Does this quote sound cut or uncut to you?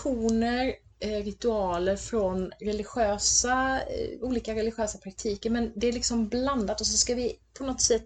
uncut